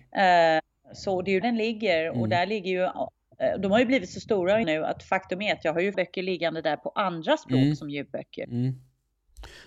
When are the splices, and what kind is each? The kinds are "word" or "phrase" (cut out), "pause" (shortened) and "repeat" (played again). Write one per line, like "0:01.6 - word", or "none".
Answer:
0:01.4 - word
0:04.6 - word
0:05.9 - phrase